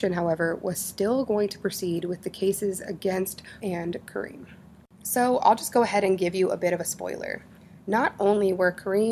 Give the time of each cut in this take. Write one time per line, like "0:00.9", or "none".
0:03.6

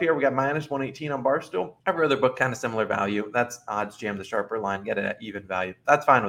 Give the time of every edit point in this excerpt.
0:01.8

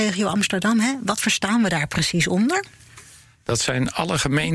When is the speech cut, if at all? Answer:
none

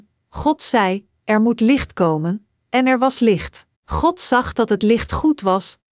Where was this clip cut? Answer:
0:03.7

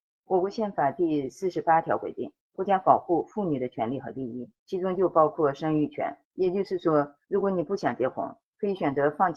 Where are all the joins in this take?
0:02.4
0:04.6
0:06.2

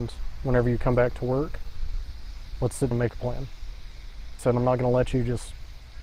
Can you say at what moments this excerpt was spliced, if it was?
0:02.9
0:04.4

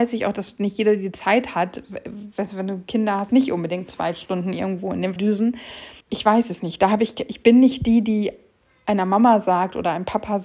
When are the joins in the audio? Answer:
0:03.3
0:05.2
0:06.0

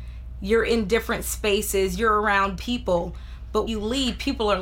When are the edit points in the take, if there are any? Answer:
0:02.6
0:03.7

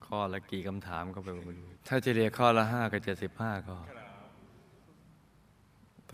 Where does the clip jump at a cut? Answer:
0:01.8

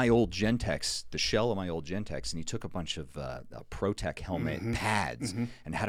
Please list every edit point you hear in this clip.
none

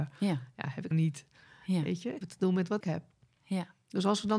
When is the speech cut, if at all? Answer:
0:00.9
0:02.2
0:02.8

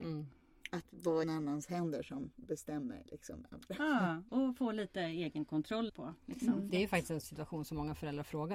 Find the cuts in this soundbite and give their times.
0:01.2
0:04.3
0:05.9
0:06.2
0:06.7
0:07.2

